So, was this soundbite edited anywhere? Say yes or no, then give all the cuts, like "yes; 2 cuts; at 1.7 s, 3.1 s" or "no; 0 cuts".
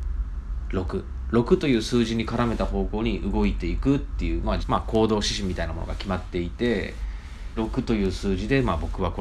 yes; 2 cuts; at 4.6 s, 7.6 s